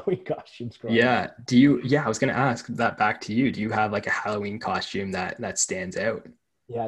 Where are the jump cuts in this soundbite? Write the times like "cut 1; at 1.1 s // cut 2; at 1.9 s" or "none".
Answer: none